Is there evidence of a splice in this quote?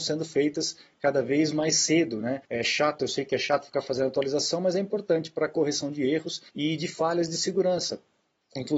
yes; 2 cuts; at 2.5 s, 6.5 s

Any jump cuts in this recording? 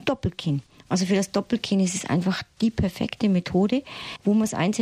no; 0 cuts

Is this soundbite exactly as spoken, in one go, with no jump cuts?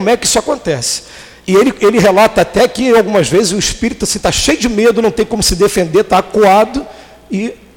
yes; 0 cuts

